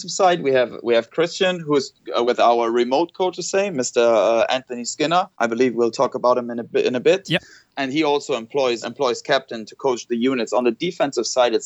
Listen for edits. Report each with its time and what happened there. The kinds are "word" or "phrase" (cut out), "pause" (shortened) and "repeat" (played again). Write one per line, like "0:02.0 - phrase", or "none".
0:02.2 - word
0:03.3 - word
0:05.3 - pause
0:08.8 - word